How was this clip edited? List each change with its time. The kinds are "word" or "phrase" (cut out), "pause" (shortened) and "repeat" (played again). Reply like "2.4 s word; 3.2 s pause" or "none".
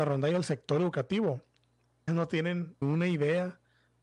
2.1 s word; 2.8 s word